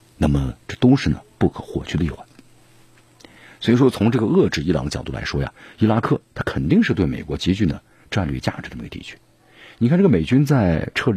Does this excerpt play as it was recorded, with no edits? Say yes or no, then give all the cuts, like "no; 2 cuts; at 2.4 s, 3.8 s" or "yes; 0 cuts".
yes; 0 cuts